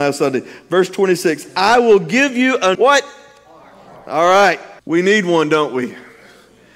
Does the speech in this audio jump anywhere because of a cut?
yes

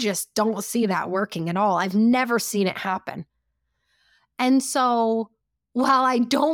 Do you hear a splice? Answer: no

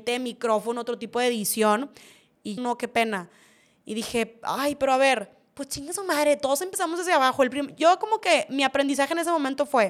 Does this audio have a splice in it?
yes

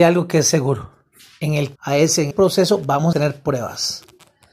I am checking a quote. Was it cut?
yes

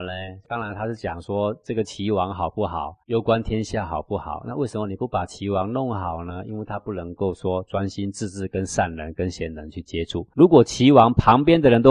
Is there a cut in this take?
yes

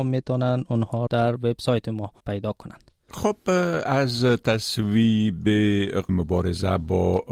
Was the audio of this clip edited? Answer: yes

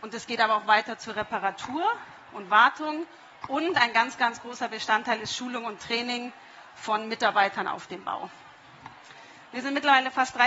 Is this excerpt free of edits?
yes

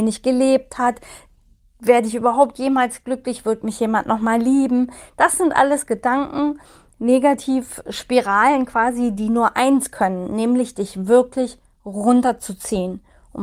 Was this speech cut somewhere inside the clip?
no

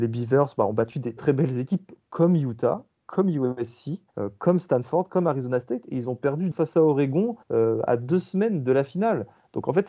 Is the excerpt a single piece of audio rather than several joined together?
no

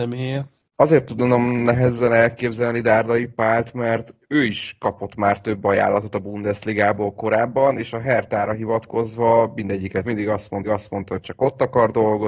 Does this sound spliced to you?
yes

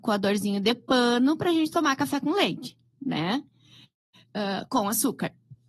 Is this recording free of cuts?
yes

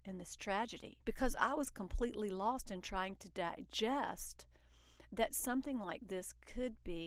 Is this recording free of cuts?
no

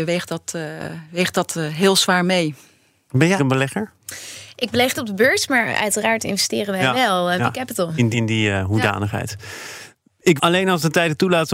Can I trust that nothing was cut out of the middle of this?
no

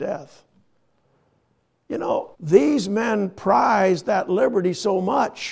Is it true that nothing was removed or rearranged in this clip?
no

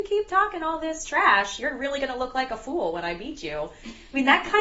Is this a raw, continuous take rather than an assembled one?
yes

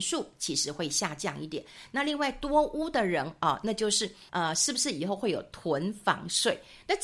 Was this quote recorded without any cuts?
no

